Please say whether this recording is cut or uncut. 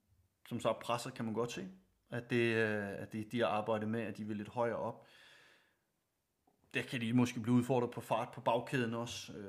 uncut